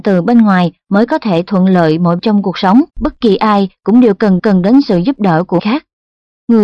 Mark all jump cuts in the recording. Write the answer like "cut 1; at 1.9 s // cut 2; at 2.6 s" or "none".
cut 1; at 2.2 s // cut 2; at 2.9 s // cut 3; at 4.4 s // cut 4; at 5.6 s